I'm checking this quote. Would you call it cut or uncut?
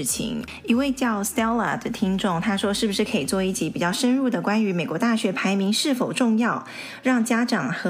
uncut